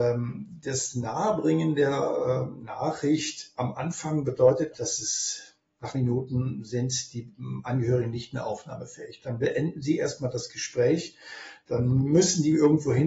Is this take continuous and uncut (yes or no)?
no